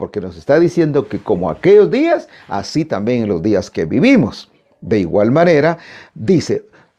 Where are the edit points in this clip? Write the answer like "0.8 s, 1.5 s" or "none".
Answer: none